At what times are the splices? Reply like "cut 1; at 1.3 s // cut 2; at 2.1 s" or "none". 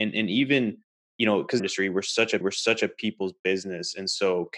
cut 1; at 1.6 s // cut 2; at 2.4 s